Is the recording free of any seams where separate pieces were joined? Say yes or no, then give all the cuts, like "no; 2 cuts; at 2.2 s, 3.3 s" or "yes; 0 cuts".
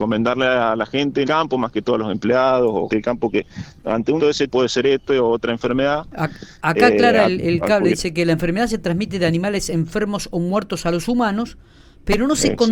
no; 4 cuts; at 1.2 s, 2.9 s, 4.2 s, 4.5 s